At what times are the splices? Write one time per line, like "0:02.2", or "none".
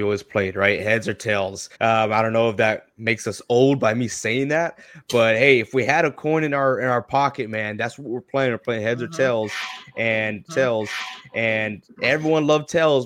0:01.7
0:10.5